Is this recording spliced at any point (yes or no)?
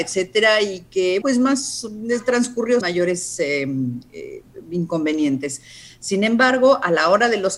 yes